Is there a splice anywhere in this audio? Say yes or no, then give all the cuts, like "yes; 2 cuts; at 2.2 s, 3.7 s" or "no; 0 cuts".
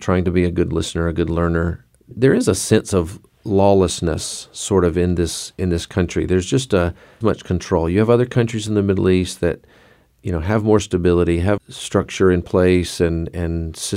yes; 3 cuts; at 2.1 s, 7.2 s, 11.6 s